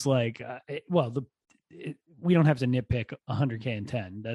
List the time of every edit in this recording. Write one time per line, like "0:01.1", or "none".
0:03.3